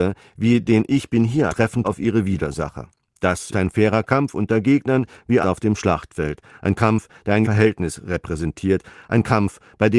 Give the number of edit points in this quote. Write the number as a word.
five